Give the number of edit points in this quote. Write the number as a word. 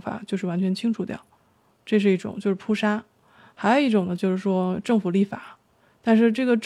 one